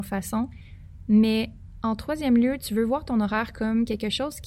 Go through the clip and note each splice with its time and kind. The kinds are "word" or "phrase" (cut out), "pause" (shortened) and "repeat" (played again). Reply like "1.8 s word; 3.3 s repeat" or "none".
none